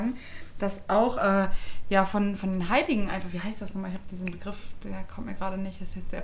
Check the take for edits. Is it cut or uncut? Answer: uncut